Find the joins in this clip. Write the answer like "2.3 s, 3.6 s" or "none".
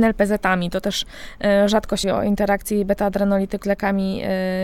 2.0 s, 3.6 s